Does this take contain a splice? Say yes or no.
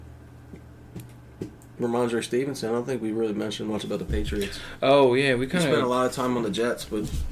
no